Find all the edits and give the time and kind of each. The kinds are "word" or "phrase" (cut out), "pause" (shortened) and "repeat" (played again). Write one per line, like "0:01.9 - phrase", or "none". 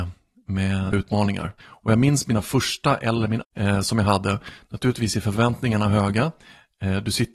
0:00.9 - word
0:01.6 - pause
0:03.4 - phrase